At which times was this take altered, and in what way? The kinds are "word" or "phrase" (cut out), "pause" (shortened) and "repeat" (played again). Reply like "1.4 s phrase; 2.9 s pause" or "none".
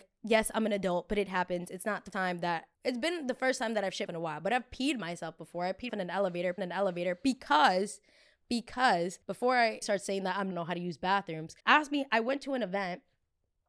2.1 s word; 2.7 s word; 4.1 s word; 5.9 s word; 6.6 s repeat; 9.2 s pause; 9.8 s word; 10.5 s phrase; 11.6 s pause